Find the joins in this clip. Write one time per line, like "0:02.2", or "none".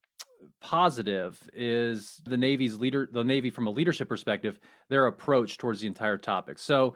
0:02.3